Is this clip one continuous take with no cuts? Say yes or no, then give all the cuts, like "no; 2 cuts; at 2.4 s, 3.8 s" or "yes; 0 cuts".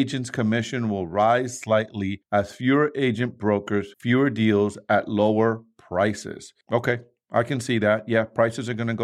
yes; 0 cuts